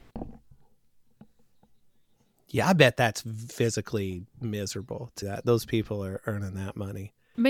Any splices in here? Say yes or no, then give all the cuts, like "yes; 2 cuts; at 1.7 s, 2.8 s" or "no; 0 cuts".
yes; 2 cuts; at 3.5 s, 5.2 s